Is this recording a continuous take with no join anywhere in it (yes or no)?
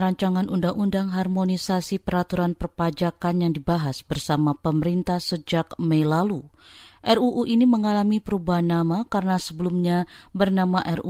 yes